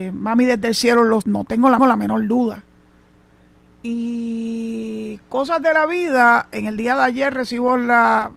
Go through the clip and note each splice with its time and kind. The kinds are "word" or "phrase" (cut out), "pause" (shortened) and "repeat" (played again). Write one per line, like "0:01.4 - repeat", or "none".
0:01.2 - word
0:01.8 - repeat